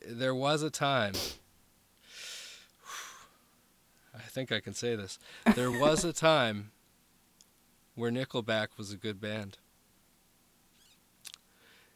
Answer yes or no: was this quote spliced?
no